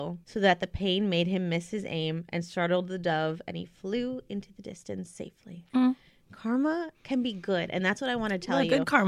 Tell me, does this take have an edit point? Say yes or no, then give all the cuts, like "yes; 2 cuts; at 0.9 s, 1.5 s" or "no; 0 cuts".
no; 0 cuts